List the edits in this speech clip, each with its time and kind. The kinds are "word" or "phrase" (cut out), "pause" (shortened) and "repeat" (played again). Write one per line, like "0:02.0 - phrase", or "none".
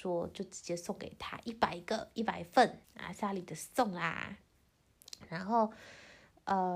0:02.8 - word